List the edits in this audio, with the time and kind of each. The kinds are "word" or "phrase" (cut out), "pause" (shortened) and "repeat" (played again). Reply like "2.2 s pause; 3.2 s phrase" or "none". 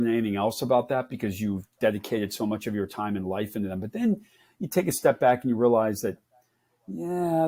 none